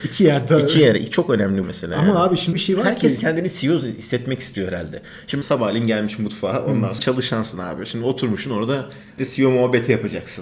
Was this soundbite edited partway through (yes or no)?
yes